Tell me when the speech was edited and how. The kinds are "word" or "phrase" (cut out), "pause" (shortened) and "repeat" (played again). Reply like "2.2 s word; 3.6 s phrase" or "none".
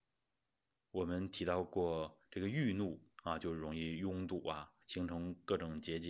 3.1 s pause; 4.8 s pause